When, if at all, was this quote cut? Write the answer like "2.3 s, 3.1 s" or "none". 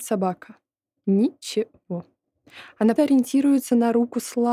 3.0 s